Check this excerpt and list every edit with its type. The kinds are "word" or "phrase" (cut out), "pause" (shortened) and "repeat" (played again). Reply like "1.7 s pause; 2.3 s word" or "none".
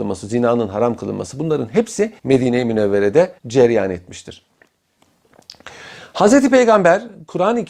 2.2 s pause; 3.4 s pause